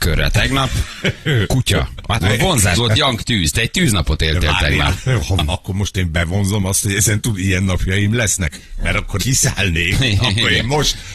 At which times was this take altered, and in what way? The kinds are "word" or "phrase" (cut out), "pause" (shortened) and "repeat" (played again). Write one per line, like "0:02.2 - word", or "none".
0:02.2 - phrase
0:02.7 - word
0:05.4 - word
0:09.2 - word